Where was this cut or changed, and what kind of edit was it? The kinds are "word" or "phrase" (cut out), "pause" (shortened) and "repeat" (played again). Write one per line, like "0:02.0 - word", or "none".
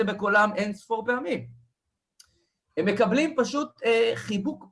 none